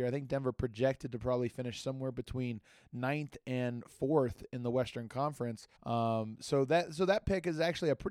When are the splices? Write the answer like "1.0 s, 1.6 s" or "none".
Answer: 5.8 s